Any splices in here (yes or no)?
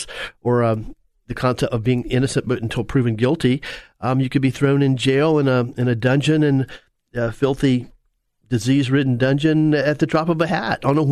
no